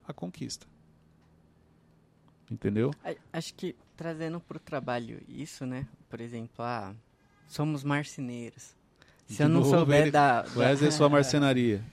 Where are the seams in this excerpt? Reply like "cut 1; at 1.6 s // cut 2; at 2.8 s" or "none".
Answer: none